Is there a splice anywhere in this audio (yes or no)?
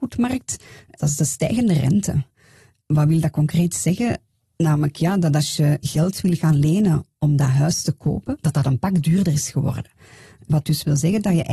no